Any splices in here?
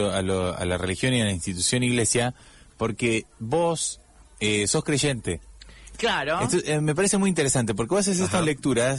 no; 0 cuts

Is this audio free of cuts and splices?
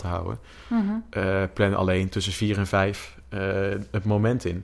yes; 0 cuts

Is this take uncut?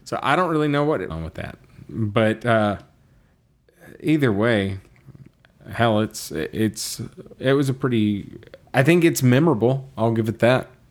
no; 2 cuts; at 1.1 s, 7.4 s

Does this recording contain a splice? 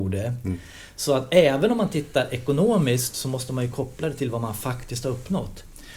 no; 0 cuts

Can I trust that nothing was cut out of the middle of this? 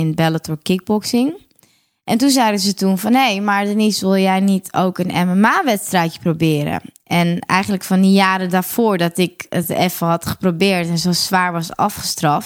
yes; 0 cuts

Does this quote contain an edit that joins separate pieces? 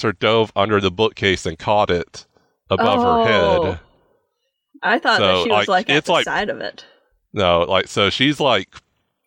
no; 0 cuts

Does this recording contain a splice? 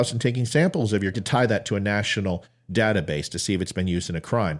yes; 1 cut; at 1.1 s

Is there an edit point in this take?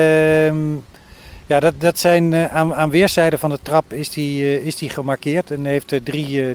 no; 0 cuts

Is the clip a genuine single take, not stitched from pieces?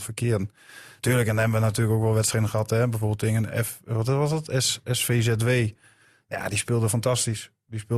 yes; 0 cuts

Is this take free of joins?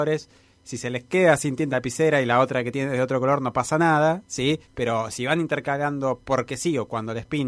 no; 2 cuts; at 1.7 s, 4.6 s

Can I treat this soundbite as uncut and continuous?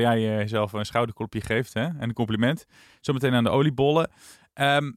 yes; 0 cuts

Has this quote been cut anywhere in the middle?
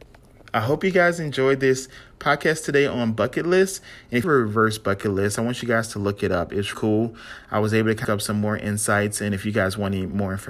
yes; 3 cuts; at 4.2 s, 6.7 s, 8.0 s

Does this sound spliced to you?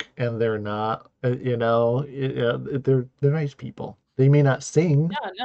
yes; 2 cuts; at 3.2 s, 4.0 s

